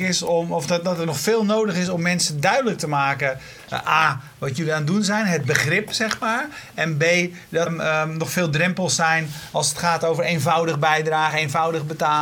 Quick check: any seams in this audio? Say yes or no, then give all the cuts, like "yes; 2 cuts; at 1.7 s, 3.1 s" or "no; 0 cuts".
yes; 1 cut; at 7.7 s